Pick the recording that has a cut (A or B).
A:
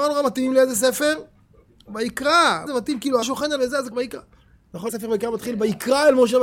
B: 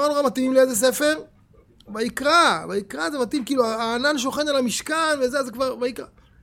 A